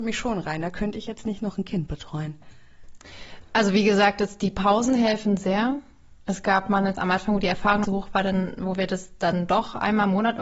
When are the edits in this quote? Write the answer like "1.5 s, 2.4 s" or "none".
6.9 s, 7.8 s